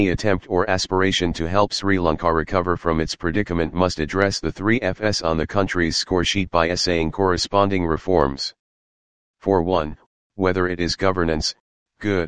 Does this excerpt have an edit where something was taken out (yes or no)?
no